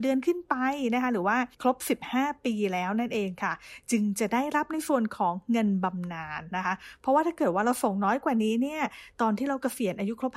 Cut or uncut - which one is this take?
cut